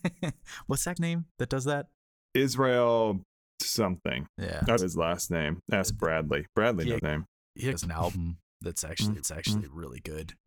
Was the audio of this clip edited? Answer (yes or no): yes